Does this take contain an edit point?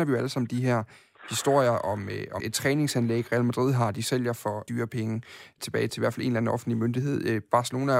yes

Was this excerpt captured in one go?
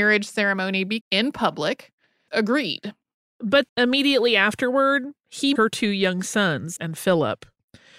no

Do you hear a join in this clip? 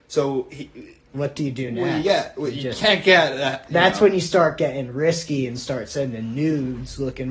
no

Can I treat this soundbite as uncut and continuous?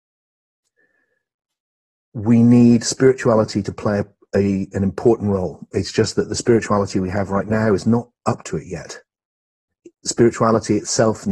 yes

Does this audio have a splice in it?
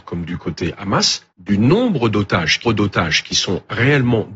yes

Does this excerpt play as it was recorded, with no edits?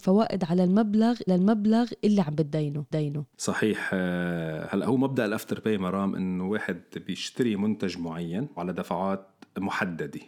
no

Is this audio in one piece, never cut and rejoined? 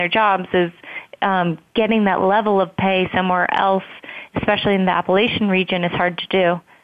yes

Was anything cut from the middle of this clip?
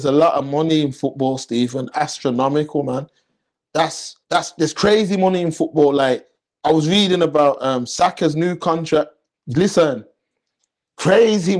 yes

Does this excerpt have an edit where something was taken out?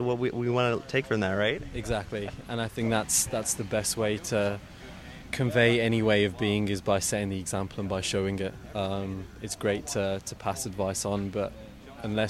yes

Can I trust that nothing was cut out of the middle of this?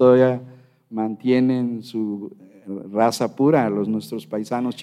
yes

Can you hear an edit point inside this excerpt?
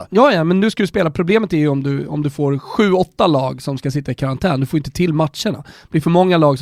no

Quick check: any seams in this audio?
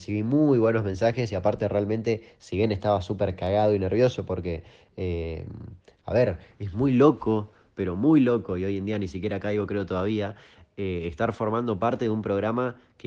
no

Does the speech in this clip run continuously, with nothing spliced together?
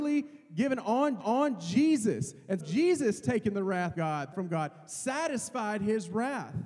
no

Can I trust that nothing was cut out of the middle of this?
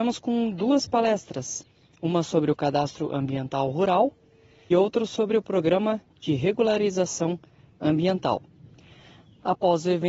no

